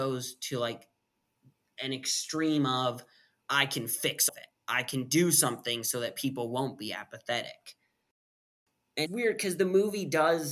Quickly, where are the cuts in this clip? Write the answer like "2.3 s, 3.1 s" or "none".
4.3 s, 9.1 s